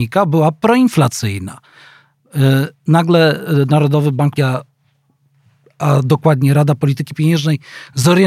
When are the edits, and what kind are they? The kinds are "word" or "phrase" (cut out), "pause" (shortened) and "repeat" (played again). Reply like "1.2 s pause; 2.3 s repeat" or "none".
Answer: 2.7 s pause; 4.4 s word